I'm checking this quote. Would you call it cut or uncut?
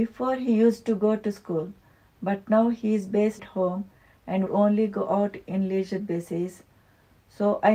cut